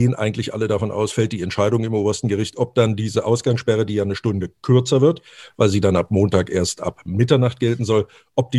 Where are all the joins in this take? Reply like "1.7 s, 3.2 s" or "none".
none